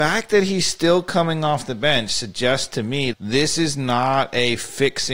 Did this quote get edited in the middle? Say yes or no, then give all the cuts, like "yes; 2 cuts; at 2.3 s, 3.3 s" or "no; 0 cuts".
yes; 1 cut; at 3.1 s